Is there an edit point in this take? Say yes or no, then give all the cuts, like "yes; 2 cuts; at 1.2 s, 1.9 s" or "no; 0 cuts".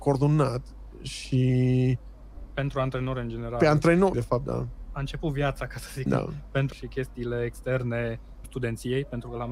yes; 4 cuts; at 4.1 s, 6.1 s, 6.7 s, 8.4 s